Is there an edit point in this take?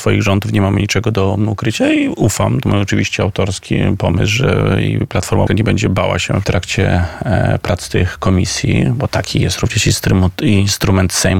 yes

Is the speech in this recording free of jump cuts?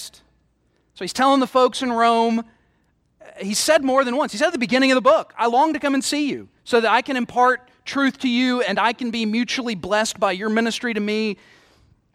no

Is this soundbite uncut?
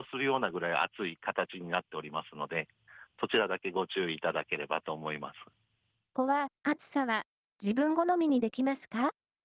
no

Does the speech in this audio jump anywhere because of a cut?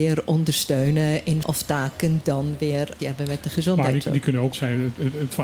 yes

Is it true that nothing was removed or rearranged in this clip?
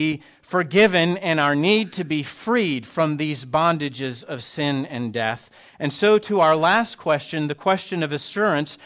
yes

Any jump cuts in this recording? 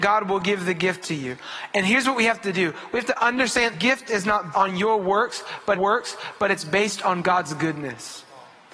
yes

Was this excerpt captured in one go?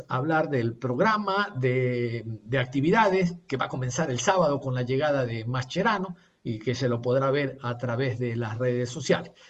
yes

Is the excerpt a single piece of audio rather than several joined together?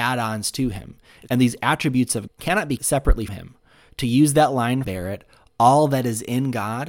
no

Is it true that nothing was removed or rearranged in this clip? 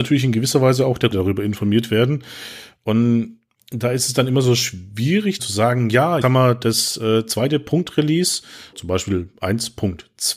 no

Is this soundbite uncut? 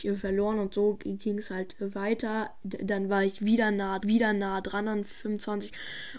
no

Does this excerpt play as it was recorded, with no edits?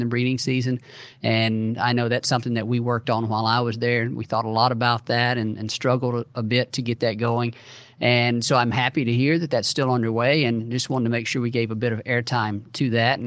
yes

